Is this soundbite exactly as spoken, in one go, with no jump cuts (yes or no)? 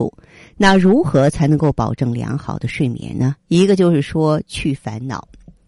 no